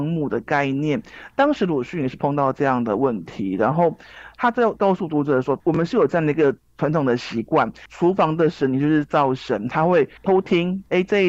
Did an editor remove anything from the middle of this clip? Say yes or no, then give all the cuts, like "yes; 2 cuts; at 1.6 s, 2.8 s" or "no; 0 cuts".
yes; 1 cut; at 10.2 s